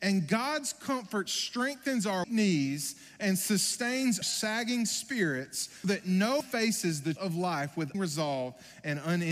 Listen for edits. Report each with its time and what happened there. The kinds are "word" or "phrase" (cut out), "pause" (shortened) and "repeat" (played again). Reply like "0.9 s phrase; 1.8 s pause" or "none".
2.2 s word; 4.2 s word; 5.8 s word; 6.4 s word; 7.2 s word; 7.9 s word